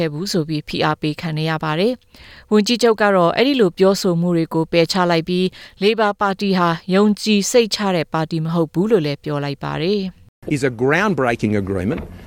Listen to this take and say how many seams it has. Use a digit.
1